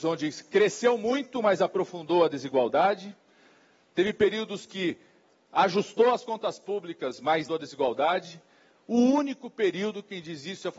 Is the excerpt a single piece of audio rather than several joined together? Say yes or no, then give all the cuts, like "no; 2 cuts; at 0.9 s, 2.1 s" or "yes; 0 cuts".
no; 1 cut; at 7.5 s